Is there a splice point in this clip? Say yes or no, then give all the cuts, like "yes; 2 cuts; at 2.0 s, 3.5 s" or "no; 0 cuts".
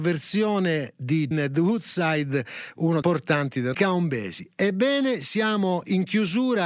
yes; 3 cuts; at 1.3 s, 3.0 s, 3.7 s